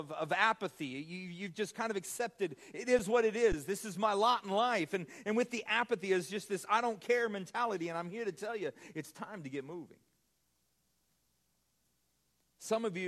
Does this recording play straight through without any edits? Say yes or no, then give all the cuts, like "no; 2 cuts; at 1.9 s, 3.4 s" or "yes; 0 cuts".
yes; 0 cuts